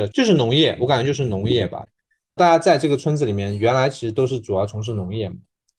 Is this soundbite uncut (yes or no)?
yes